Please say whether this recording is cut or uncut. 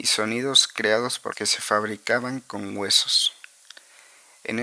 cut